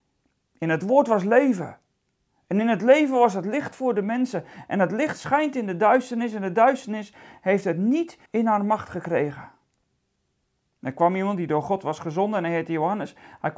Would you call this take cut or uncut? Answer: cut